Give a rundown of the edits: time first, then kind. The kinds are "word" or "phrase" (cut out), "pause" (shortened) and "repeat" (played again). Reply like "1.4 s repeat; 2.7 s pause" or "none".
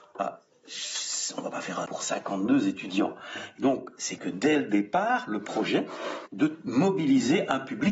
1.9 s word; 4.2 s word; 6.3 s word